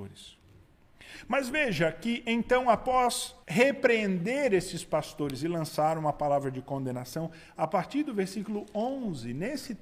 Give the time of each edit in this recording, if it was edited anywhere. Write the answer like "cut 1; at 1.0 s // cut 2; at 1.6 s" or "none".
cut 1; at 3.4 s